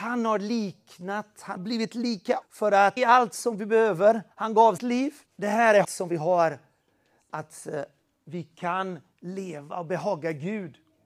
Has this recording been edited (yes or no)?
yes